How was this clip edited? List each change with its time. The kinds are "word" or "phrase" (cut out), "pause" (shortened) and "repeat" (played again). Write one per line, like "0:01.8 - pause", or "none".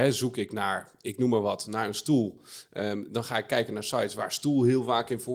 none